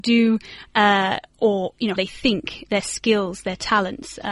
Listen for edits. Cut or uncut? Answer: cut